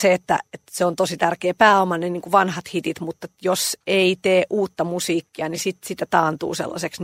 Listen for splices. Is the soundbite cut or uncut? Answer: uncut